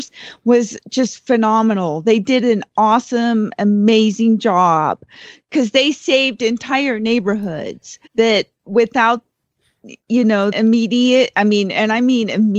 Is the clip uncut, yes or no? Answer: no